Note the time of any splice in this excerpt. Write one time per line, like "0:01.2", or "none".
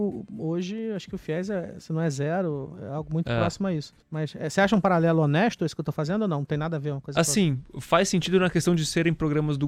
0:04.0